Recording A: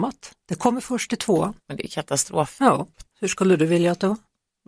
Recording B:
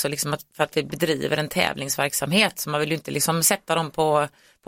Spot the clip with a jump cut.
A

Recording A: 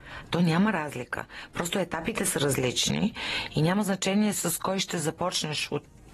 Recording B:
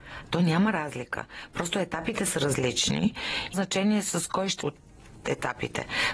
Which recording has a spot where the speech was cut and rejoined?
B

